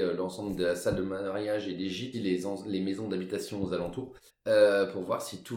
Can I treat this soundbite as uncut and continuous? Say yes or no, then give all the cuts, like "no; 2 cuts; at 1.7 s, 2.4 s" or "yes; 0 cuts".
no; 2 cuts; at 2.1 s, 4.3 s